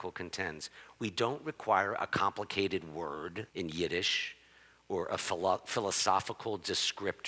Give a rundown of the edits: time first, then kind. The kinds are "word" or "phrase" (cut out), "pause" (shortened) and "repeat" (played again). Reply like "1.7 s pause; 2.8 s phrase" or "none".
3.5 s pause